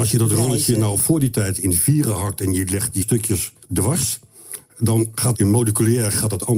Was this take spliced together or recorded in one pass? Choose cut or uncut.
cut